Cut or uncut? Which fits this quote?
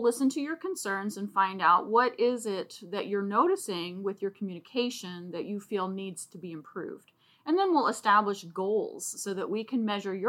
uncut